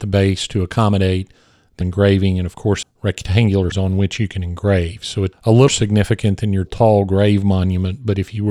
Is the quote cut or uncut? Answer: cut